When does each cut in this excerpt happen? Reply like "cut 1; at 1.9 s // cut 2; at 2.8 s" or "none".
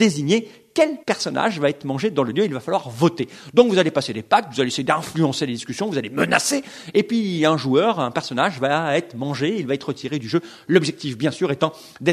cut 1; at 1.0 s